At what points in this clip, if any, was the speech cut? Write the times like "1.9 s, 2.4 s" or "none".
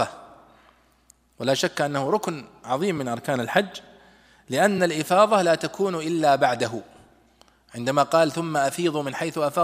none